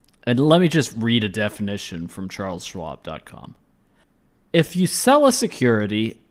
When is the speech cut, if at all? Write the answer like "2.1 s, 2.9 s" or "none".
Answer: none